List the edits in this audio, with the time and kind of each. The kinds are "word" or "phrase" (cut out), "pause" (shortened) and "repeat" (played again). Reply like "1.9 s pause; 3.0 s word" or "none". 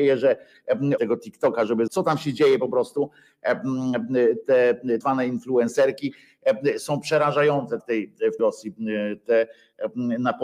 1.0 s word; 1.9 s word; 5.0 s word; 6.8 s word; 7.8 s word; 8.4 s word